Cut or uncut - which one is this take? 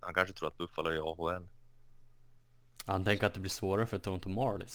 uncut